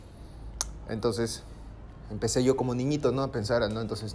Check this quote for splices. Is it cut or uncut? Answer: uncut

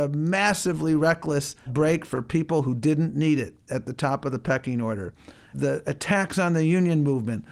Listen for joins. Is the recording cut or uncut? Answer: cut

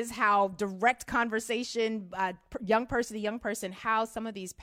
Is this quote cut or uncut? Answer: uncut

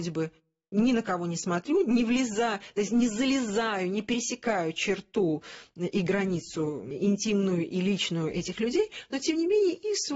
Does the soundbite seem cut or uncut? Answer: uncut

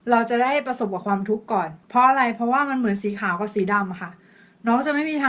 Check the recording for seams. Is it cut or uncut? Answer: uncut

